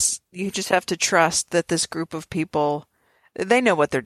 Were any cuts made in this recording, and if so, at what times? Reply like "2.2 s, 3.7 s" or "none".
none